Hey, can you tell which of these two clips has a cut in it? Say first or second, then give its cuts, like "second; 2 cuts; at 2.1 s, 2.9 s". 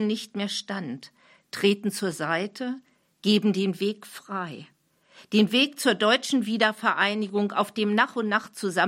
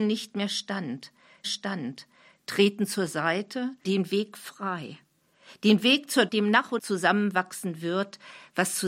second; 4 cuts; at 1.4 s, 3.8 s, 6.3 s, 6.8 s